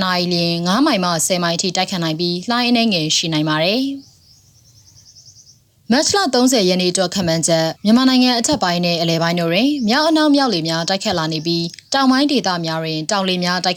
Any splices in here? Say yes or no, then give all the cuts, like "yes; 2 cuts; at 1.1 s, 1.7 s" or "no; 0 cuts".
yes; 1 cut; at 7.8 s